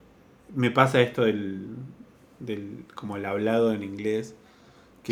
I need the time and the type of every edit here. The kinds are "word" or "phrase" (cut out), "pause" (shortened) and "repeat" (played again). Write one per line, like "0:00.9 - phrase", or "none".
none